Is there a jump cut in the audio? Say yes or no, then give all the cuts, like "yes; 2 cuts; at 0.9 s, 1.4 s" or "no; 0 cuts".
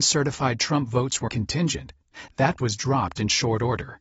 yes; 2 cuts; at 1.3 s, 2.6 s